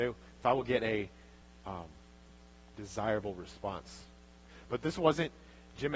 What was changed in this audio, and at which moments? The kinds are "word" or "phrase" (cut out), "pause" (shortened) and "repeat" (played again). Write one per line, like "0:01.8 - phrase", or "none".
none